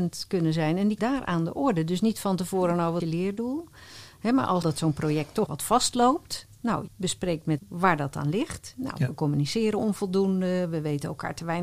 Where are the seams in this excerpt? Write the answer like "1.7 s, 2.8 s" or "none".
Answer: 1.0 s, 3.0 s, 4.6 s, 5.5 s, 6.9 s, 7.6 s